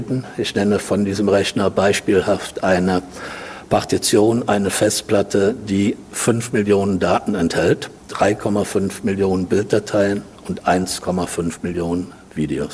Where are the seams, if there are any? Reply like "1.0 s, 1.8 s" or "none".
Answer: 8.0 s